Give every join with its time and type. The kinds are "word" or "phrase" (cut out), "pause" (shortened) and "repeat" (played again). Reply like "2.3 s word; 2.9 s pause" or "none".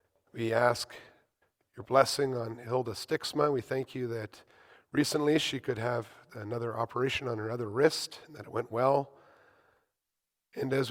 none